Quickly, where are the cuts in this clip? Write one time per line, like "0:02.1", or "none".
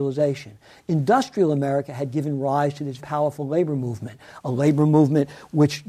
0:03.0

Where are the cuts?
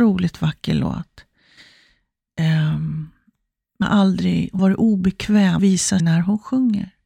0:03.8
0:04.6
0:05.6
0:06.0

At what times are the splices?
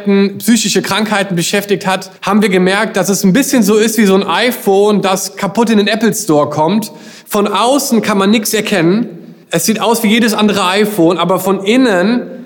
0:02.2
0:09.4

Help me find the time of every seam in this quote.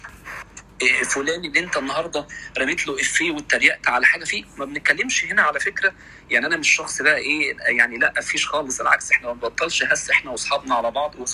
none

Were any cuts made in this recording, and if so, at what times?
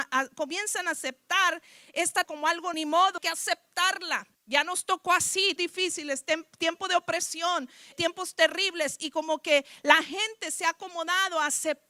0:02.2
0:02.7
0:03.2
0:04.4
0:05.6
0:07.9

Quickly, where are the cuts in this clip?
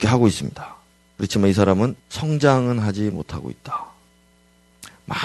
0:02.0

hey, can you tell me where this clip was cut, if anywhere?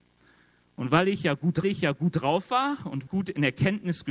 0:01.6
0:03.1

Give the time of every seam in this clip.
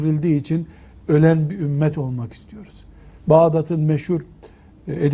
0:03.2

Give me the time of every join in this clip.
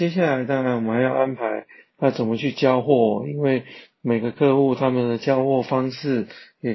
none

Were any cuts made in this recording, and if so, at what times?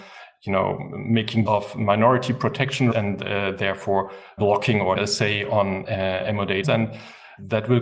0:01.5
0:02.9
0:04.4
0:05.0
0:05.8
0:06.6

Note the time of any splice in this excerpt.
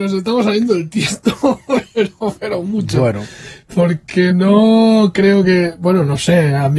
none

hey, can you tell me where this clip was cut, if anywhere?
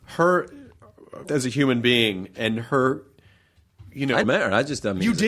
0:01.2
0:04.2

